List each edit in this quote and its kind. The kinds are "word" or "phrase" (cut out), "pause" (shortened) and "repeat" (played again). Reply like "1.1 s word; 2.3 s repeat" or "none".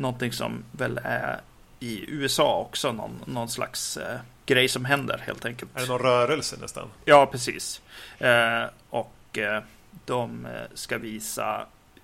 none